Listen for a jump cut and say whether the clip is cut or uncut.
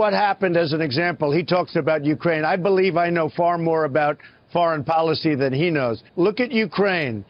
cut